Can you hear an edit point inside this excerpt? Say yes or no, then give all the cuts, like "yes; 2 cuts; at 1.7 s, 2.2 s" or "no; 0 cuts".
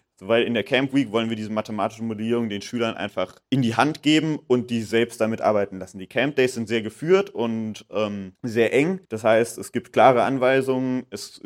yes; 3 cuts; at 3.4 s, 8.4 s, 9.0 s